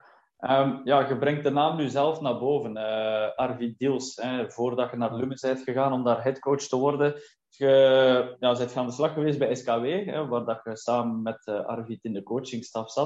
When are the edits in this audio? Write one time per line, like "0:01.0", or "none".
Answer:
none